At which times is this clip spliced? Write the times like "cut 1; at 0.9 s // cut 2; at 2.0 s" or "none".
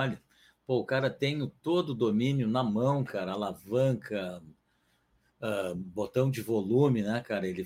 none